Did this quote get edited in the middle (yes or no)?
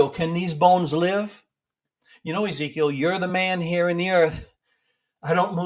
no